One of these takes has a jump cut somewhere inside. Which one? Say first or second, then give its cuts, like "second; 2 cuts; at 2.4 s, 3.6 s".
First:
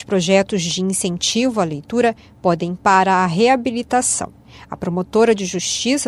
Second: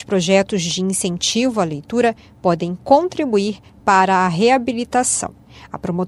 first; 1 cut; at 2.8 s